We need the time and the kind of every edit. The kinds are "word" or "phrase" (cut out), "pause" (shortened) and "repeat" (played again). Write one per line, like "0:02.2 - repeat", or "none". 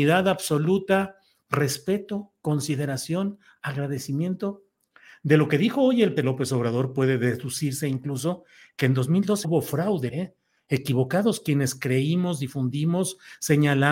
0:06.2 - word
0:09.4 - word
0:10.1 - word